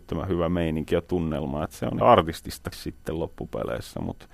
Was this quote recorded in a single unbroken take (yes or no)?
no